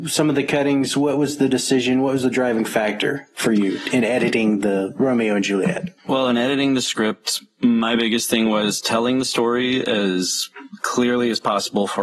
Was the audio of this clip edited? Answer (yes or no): yes